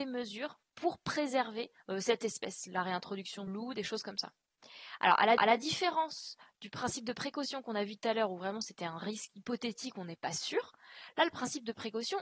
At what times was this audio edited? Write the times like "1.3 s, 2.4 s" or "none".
1.8 s, 3.5 s, 5.4 s

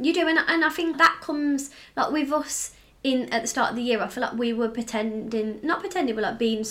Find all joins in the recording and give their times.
0.9 s

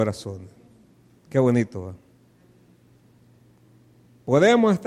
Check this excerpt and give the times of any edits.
none

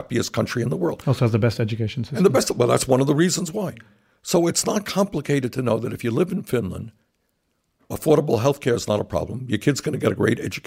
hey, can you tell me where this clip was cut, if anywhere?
none

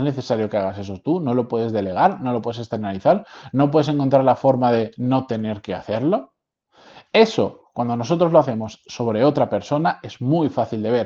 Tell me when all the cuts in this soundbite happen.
none

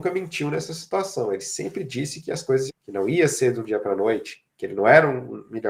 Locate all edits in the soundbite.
2.7 s

